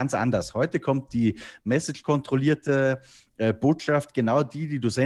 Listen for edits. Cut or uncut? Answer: uncut